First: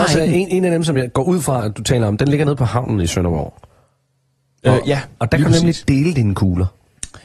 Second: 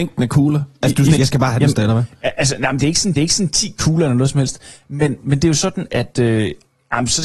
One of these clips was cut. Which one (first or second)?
second